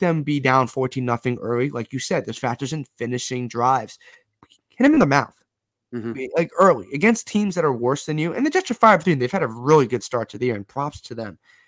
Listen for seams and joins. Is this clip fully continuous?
yes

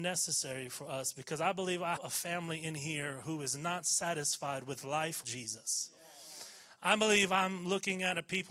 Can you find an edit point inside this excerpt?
yes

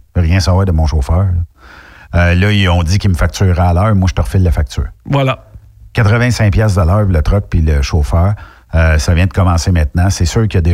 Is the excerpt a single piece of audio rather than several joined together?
yes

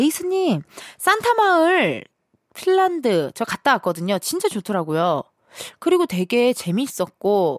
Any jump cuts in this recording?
no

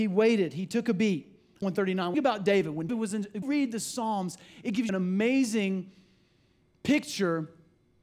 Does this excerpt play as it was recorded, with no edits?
no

